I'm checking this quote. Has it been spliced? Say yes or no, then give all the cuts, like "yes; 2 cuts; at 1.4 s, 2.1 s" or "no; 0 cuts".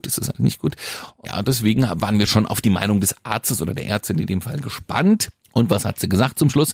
no; 0 cuts